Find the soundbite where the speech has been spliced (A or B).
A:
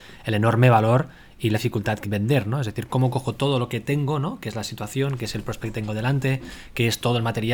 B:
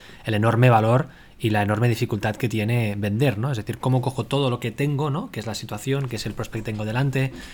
A